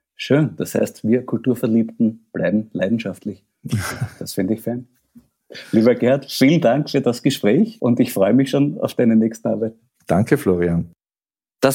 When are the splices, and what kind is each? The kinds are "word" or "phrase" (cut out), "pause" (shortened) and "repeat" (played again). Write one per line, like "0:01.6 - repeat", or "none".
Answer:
none